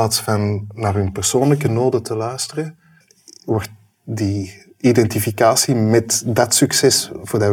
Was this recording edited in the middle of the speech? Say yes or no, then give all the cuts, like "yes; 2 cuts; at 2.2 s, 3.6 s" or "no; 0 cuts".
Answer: yes; 1 cut; at 3.0 s